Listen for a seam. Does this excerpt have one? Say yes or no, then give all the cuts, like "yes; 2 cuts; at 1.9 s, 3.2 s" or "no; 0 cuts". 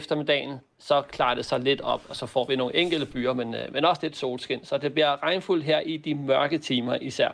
no; 0 cuts